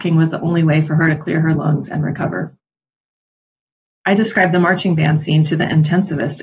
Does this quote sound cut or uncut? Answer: uncut